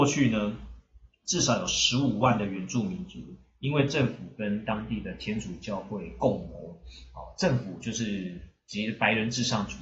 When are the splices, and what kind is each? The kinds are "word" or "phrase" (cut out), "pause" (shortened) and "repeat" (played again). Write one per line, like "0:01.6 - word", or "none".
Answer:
none